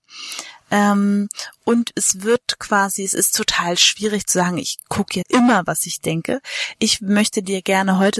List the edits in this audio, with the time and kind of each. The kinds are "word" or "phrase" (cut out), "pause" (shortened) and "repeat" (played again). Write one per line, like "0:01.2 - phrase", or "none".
0:05.2 - word